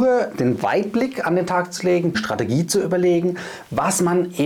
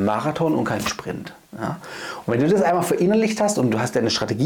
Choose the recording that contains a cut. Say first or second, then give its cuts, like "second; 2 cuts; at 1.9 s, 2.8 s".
first; 1 cut; at 2.1 s